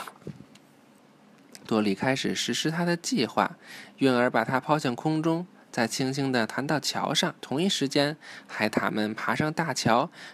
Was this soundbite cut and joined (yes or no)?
yes